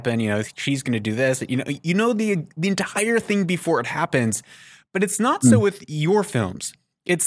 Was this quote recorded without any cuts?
yes; 0 cuts

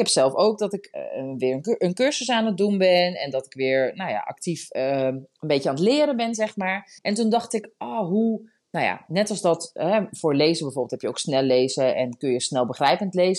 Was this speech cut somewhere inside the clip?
yes; 1 cut; at 7.0 s

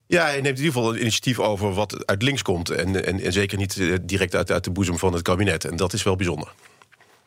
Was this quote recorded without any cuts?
no; 1 cut; at 4.5 s

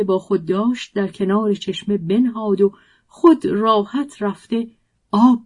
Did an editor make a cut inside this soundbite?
no; 0 cuts

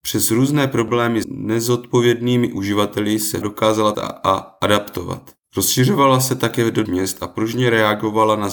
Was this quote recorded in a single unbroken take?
no; 5 cuts; at 1.2 s, 3.4 s, 3.9 s, 5.4 s, 6.8 s

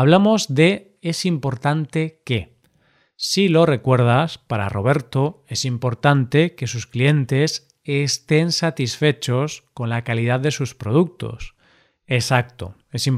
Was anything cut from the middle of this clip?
no; 0 cuts

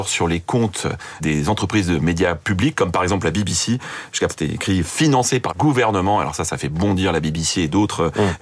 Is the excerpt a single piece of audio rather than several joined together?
no; 3 cuts; at 1.2 s, 4.3 s, 5.5 s

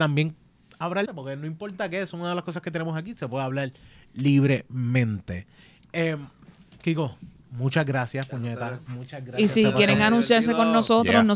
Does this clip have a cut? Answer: yes; 1 cut; at 1.1 s

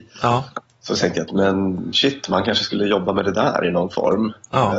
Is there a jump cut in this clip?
no; 0 cuts

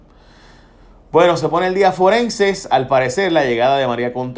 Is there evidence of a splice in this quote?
no; 0 cuts

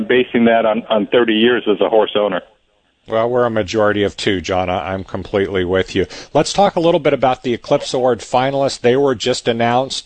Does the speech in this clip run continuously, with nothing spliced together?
yes; 0 cuts

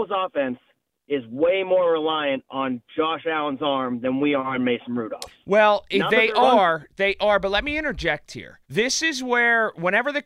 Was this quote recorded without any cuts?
no; 1 cut; at 8.6 s

